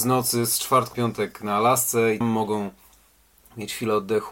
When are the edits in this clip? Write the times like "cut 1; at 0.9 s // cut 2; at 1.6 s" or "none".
cut 1; at 0.9 s // cut 2; at 2.2 s